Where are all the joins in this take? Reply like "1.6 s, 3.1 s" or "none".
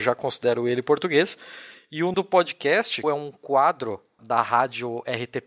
2.1 s, 3.0 s, 4.2 s